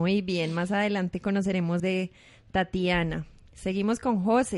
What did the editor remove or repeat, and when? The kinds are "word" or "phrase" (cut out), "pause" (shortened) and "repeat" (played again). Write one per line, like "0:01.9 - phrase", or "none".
0:01.8 - word